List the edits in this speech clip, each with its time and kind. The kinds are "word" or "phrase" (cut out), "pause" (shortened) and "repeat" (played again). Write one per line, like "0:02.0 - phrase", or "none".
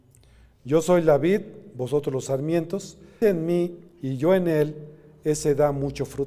0:03.2 - phrase
0:03.9 - pause